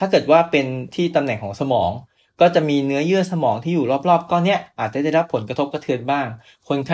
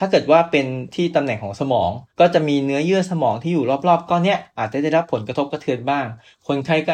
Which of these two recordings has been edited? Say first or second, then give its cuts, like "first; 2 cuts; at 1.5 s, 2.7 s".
second; 1 cut; at 2.1 s